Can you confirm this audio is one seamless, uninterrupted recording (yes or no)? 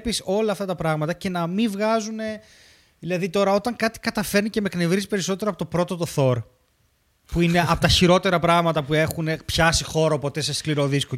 yes